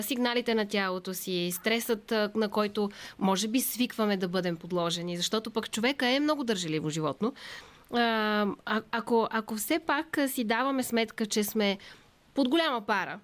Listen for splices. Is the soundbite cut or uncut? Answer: uncut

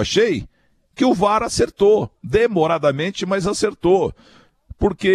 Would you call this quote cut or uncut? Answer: uncut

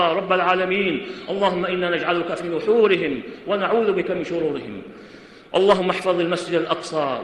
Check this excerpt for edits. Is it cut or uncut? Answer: uncut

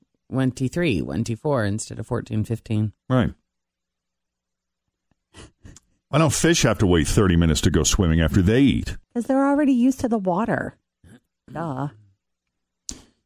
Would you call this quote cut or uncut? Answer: cut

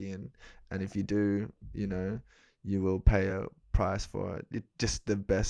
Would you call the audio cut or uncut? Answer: uncut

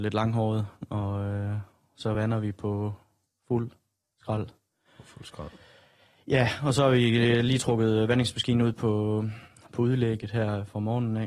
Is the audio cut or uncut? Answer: uncut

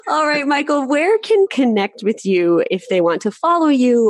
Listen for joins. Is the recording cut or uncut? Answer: cut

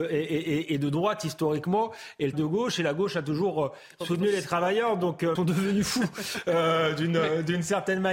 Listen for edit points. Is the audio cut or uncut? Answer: cut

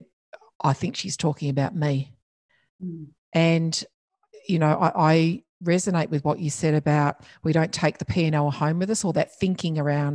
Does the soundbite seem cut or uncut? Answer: uncut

